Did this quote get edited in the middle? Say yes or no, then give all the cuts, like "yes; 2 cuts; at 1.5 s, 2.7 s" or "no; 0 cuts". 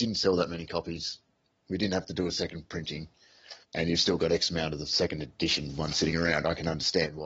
yes; 1 cut; at 3.6 s